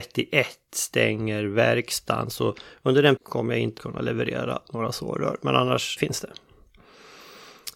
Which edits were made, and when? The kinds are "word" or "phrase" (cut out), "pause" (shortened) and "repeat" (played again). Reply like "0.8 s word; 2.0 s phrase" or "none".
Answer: 3.2 s word; 3.8 s word; 6.0 s word